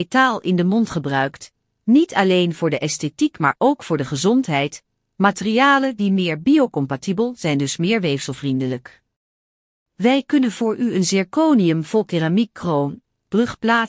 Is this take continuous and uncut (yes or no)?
yes